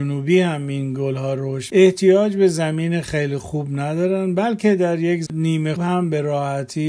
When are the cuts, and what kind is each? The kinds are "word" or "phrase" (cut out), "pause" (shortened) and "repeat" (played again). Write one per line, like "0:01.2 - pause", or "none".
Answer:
0:01.7 - word
0:05.3 - word
0:05.8 - word